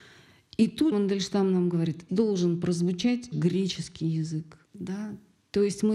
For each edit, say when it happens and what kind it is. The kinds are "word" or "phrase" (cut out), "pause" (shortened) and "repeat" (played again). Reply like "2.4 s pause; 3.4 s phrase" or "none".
0.9 s word; 2.1 s word; 3.3 s word; 4.6 s pause